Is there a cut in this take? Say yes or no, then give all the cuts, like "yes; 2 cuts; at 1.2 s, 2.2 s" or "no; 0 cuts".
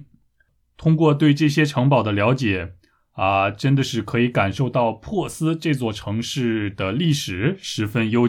no; 0 cuts